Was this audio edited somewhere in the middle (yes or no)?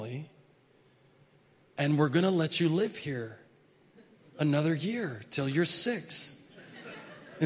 no